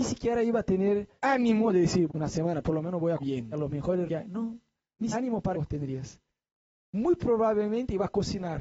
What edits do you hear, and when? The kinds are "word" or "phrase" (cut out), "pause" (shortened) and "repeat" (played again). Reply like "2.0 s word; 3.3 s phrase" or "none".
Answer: 1.2 s word; 2.1 s word; 2.6 s word; 3.2 s word; 3.5 s word; 4.1 s word; 5.1 s word; 5.5 s word